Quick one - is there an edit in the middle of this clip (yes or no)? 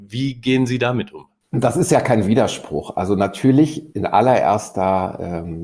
yes